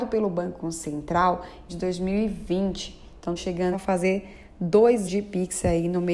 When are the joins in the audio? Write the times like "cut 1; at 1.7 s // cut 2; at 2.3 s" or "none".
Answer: cut 1; at 1.7 s // cut 2; at 3.4 s // cut 3; at 3.7 s // cut 4; at 5.1 s